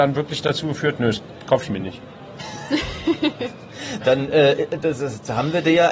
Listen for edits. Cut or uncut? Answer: uncut